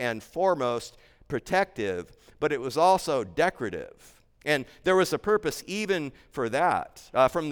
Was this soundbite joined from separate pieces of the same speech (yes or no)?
no